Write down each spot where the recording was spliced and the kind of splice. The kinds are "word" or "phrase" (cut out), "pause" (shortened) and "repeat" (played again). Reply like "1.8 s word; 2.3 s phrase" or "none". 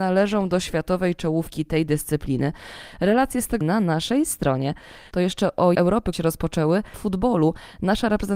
3.6 s phrase; 5.7 s phrase; 6.1 s word; 6.9 s phrase